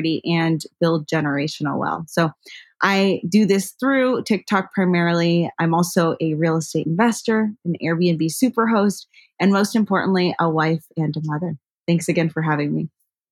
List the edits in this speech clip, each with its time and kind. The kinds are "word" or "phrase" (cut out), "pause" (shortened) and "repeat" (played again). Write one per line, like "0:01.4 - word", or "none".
none